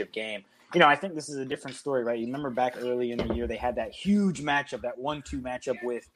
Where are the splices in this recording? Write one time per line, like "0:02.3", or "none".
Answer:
none